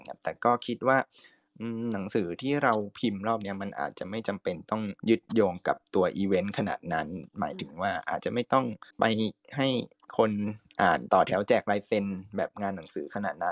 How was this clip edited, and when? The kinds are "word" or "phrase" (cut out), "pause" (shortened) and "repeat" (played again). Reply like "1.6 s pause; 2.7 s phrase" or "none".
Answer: 5.0 s pause; 8.9 s pause

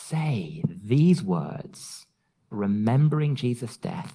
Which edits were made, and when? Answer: 2.5 s word

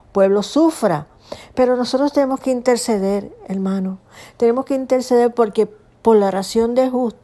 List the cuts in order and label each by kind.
none

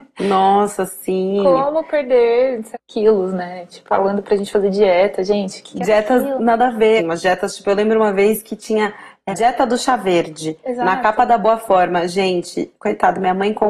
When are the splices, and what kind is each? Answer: 2.7 s word; 3.9 s word; 7.0 s word; 9.3 s word

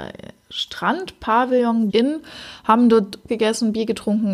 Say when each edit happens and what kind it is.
1.9 s word; 3.3 s word

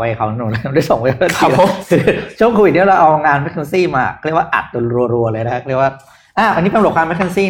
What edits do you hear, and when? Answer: none

